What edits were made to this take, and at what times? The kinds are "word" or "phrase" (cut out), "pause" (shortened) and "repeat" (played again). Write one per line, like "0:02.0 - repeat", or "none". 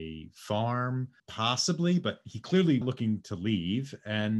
0:01.2 - pause
0:02.8 - phrase

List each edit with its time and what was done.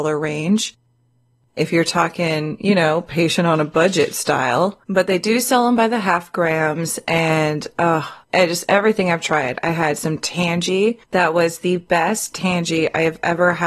0:04.8 - pause
0:08.2 - pause
0:11.0 - pause

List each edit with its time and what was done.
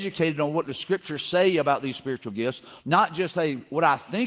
0:02.8 - pause

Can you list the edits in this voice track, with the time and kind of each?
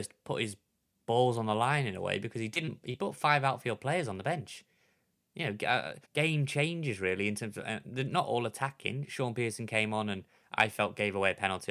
0:06.0 - pause

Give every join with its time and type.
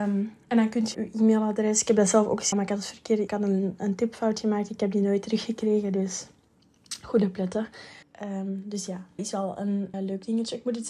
0:00.9 - word
0:02.5 - word
0:03.3 - phrase
0:08.0 - pause
0:09.2 - word
0:09.9 - word

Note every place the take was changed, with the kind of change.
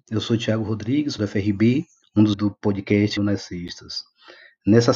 0:01.2 - word
0:02.0 - pause
0:02.3 - word
0:03.2 - word

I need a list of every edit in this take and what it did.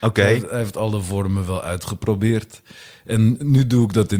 none

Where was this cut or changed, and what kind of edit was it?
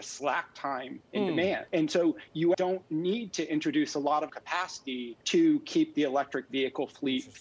0:01.0 - pause
0:01.7 - pause
0:02.5 - word
0:04.3 - word
0:05.2 - pause

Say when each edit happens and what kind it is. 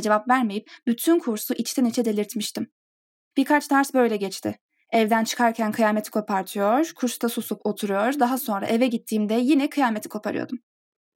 none

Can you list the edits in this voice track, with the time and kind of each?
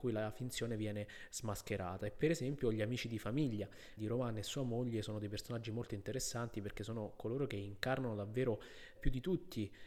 0:04.0 - word
0:09.0 - word

